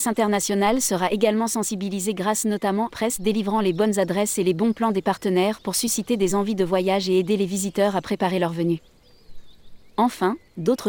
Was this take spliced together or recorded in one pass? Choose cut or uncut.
cut